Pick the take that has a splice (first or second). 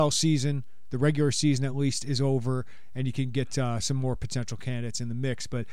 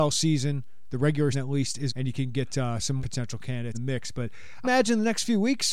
second